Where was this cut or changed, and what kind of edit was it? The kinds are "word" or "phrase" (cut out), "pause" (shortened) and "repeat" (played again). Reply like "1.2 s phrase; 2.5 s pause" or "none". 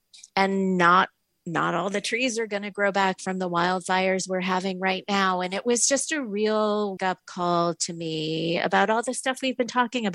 7.0 s word